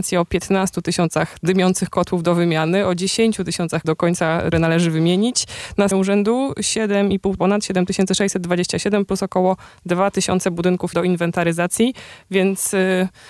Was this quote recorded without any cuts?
no; 5 cuts; at 3.8 s, 4.5 s, 5.9 s, 7.4 s, 10.9 s

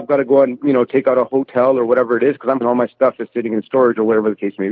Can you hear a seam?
yes; 1 cut; at 2.6 s

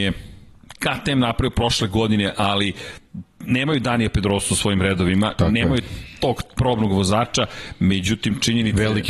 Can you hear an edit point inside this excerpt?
no; 0 cuts

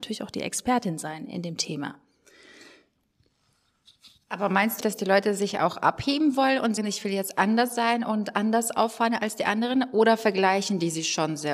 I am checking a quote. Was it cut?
yes; 2 cuts; at 4.8 s, 6.8 s

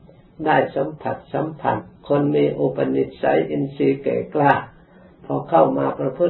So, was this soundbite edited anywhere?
yes; 1 cut; at 2.0 s

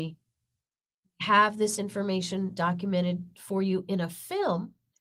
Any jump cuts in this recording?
no; 0 cuts

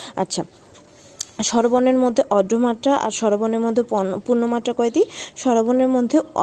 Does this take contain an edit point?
no; 0 cuts

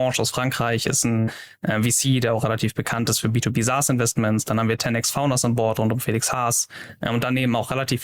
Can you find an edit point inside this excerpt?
no; 0 cuts

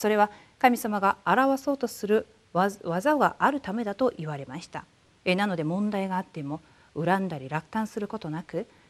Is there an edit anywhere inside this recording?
no; 0 cuts

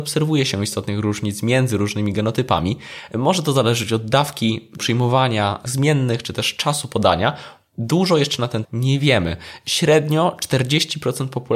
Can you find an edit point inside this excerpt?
yes; 3 cuts; at 4.8 s, 5.7 s, 8.6 s

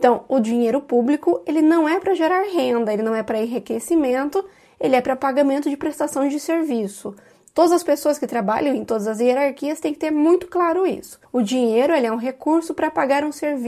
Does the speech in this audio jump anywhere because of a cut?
no; 0 cuts

